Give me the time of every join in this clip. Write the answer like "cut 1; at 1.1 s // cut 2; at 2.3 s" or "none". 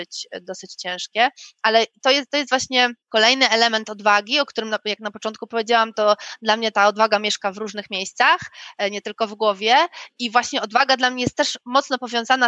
cut 1; at 3.0 s